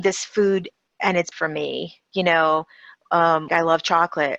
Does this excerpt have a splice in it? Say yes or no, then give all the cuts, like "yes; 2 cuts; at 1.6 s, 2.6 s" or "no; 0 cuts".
yes; 2 cuts; at 1.3 s, 3.5 s